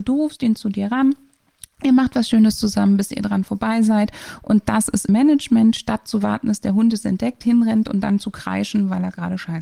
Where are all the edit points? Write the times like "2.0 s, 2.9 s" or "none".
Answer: 5.1 s